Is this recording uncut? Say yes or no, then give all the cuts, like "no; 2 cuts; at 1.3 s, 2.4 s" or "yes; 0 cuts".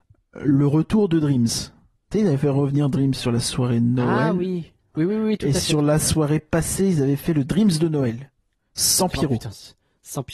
yes; 0 cuts